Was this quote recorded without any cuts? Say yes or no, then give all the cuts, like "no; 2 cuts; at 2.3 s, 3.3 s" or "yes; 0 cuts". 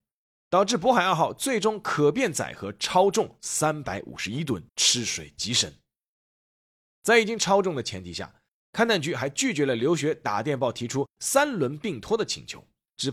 no; 1 cut; at 4.7 s